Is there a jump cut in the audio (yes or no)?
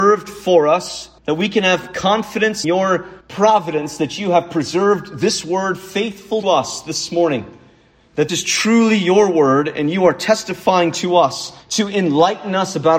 yes